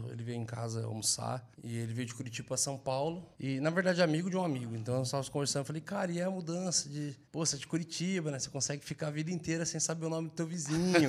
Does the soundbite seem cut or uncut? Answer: cut